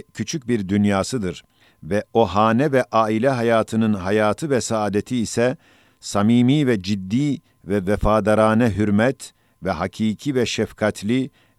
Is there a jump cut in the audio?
no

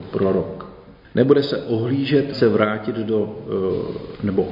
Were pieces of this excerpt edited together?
yes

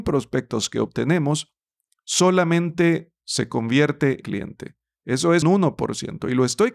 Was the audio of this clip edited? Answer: yes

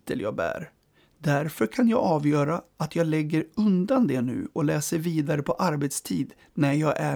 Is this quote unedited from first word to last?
yes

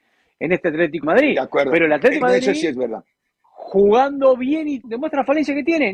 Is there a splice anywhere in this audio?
yes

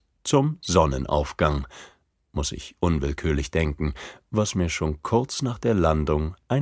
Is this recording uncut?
yes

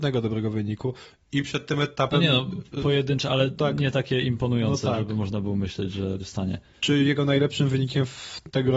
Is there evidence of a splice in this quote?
yes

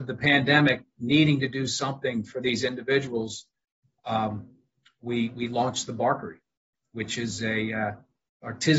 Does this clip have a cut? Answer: no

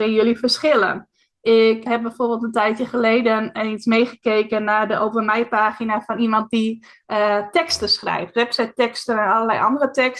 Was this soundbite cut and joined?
yes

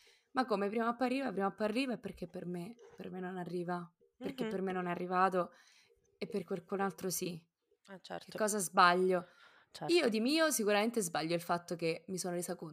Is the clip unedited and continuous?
yes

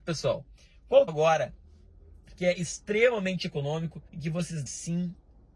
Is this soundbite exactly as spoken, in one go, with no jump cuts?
no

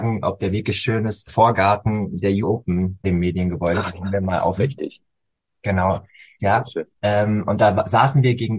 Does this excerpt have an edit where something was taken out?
yes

